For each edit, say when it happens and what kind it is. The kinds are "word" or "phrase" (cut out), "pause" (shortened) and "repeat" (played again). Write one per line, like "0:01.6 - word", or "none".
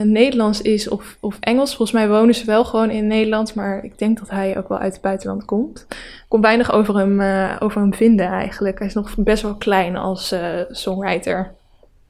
none